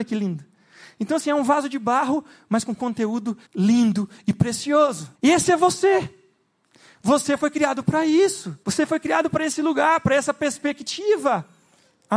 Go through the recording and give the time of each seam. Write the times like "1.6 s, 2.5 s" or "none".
3.5 s, 5.1 s, 8.6 s